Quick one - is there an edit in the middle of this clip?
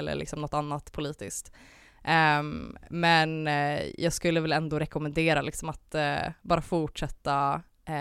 no; 0 cuts

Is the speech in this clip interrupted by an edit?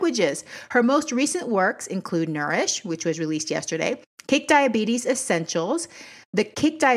no; 0 cuts

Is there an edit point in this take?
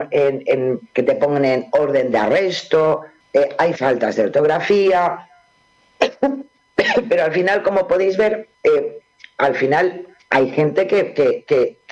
yes; 2 cuts; at 3.2 s, 8.5 s

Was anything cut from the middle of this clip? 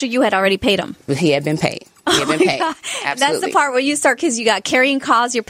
yes; 2 cuts; at 1.1 s, 4.2 s

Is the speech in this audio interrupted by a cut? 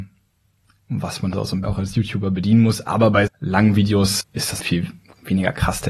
yes; 5 cuts; at 1.3 s, 1.6 s, 3.3 s, 4.2 s, 4.6 s

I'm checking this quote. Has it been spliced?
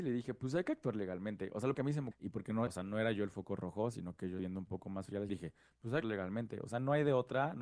yes; 6 cuts; at 1.7 s, 2.1 s, 2.7 s, 4.4 s, 5.3 s, 6.0 s

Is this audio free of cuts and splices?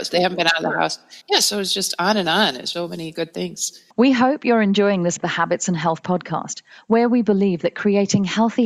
no; 4 cuts; at 1.2 s, 2.7 s, 3.9 s, 5.2 s

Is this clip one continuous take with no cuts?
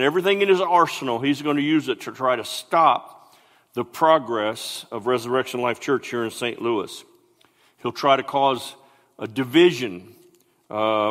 yes; 0 cuts

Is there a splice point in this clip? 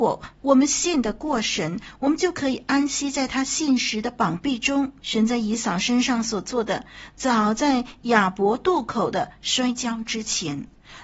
yes; 1 cut; at 5.0 s

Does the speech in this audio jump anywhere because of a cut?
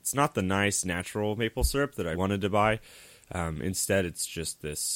yes; 1 cut; at 2.1 s

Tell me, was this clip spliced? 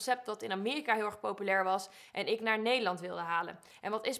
no; 0 cuts

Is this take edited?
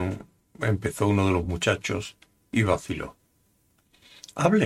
no; 0 cuts

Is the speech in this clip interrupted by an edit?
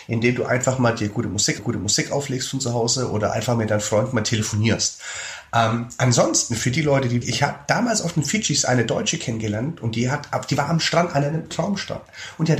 yes; 3 cuts; at 1.6 s, 7.2 s, 11.5 s

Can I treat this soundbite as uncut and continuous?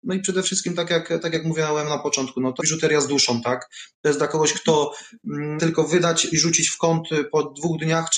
no; 3 cuts; at 2.6 s, 5.6 s, 6.3 s

